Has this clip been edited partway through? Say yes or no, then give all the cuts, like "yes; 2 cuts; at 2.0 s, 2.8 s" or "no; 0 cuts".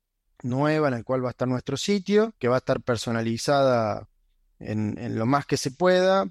yes; 1 cut; at 2.4 s